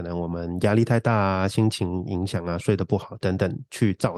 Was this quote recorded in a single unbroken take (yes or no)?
yes